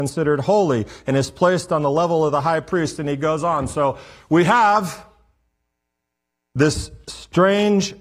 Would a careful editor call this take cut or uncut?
uncut